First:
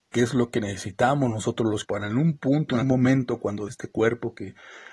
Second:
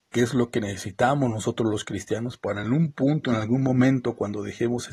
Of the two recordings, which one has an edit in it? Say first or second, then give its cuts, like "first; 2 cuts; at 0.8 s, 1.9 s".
first; 3 cuts; at 1.8 s, 2.8 s, 3.7 s